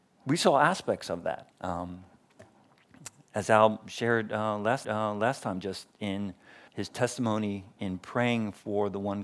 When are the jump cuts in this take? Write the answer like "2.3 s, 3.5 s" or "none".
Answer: 1.5 s, 4.8 s, 6.7 s

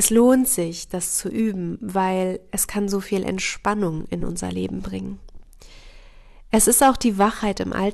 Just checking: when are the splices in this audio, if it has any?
none

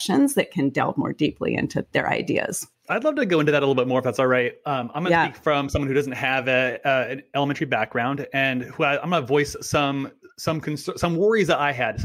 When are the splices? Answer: 1.8 s

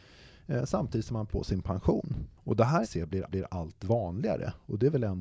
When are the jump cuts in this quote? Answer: 1.3 s, 2.4 s, 2.8 s, 3.3 s

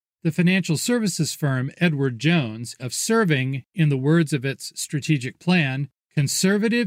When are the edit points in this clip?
2.8 s

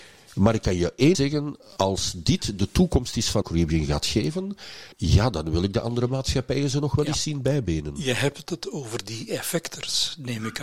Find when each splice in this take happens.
1.1 s, 3.4 s, 4.9 s

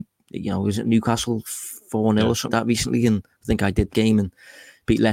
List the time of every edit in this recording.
2.5 s, 3.9 s

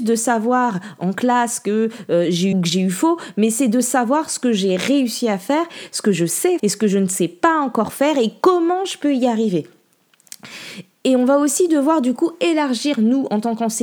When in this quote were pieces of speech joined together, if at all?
2.5 s, 6.6 s

